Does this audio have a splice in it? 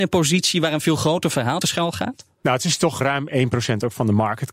yes; 2 cuts; at 1.6 s, 3.0 s

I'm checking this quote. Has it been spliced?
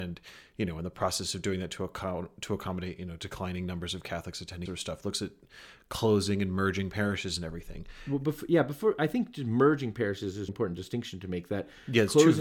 yes; 2 cuts; at 4.7 s, 10.5 s

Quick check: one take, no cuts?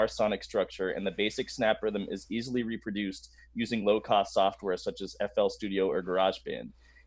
yes; 0 cuts

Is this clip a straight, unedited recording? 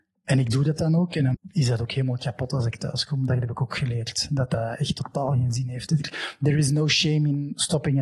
no; 1 cut; at 1.3 s

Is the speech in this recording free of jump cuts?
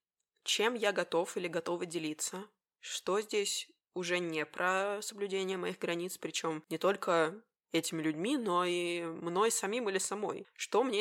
no; 1 cut; at 2.6 s

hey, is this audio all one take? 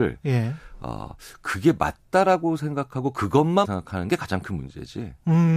no; 1 cut; at 3.6 s

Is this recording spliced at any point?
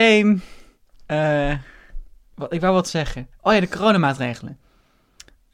no; 0 cuts

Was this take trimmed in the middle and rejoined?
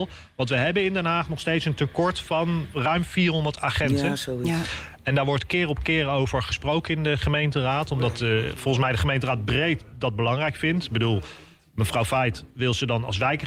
no; 0 cuts

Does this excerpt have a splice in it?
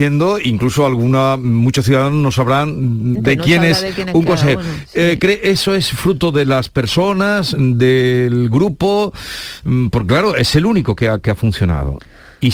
yes; 1 cut; at 3.2 s

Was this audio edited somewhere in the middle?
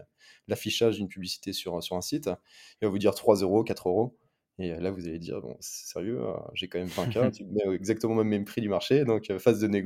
no; 0 cuts

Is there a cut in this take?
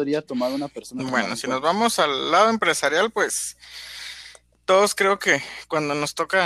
no; 0 cuts

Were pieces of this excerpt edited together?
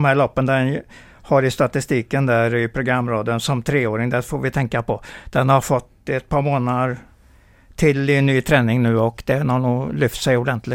no; 0 cuts

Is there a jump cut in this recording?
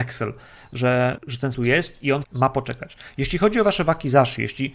yes; 3 cuts; at 1.2 s, 1.5 s, 2.2 s

